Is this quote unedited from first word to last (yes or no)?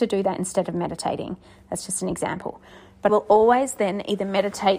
no